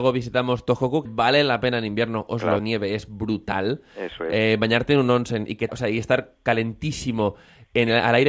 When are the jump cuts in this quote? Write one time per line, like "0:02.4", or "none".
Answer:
0:01.0
0:02.6
0:05.7